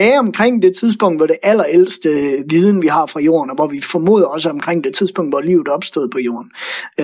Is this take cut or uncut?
uncut